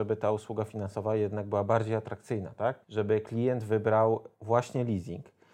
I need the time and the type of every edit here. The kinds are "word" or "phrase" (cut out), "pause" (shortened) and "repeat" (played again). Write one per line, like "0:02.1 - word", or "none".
0:02.8 - pause
0:04.3 - pause

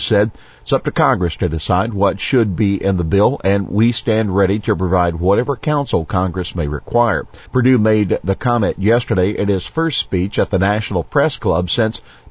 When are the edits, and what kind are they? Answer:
0:07.5 - pause

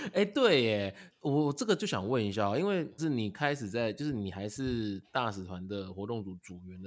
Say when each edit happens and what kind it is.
0:03.0 - word

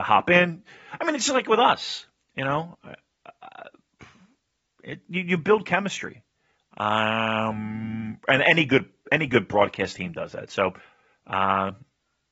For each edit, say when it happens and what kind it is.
none

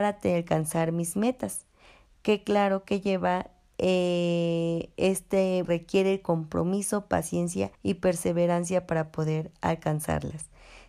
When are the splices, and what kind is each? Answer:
0:05.6 - word
0:07.7 - pause

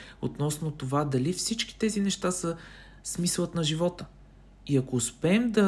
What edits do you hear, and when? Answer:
none

